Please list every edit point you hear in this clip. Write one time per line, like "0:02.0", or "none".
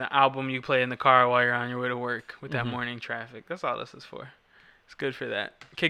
none